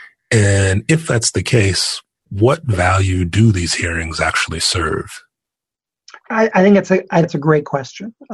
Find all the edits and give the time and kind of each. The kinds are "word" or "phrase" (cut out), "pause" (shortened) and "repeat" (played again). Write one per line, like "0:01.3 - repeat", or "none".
0:07.2 - word